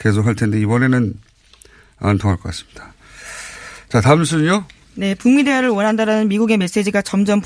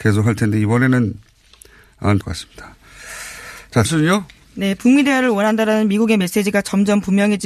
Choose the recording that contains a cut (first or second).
second